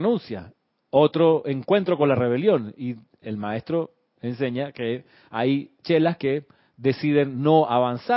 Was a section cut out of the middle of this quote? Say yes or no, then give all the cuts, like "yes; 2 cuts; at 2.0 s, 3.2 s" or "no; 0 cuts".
no; 0 cuts